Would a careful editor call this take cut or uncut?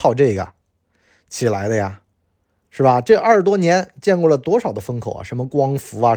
uncut